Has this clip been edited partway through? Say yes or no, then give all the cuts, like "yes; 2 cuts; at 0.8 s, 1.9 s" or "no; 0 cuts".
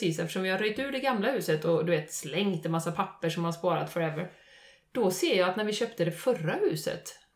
no; 0 cuts